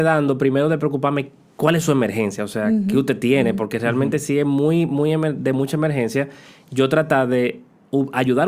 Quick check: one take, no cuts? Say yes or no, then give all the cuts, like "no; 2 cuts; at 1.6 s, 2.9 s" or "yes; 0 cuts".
yes; 0 cuts